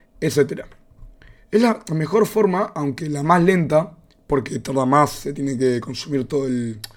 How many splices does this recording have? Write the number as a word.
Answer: zero